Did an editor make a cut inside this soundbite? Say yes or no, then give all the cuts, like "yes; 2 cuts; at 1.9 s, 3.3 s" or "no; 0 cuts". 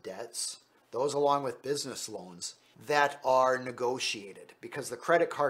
no; 0 cuts